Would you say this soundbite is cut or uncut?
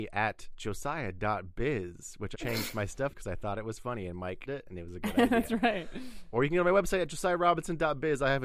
cut